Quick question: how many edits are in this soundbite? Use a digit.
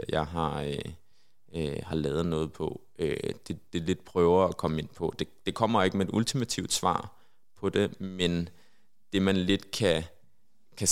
0